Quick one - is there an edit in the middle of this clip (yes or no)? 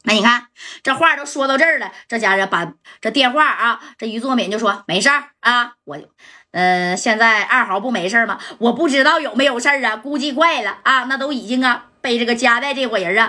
no